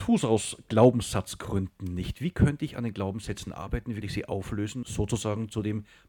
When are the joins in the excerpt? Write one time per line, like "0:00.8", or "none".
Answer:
0:04.0
0:04.8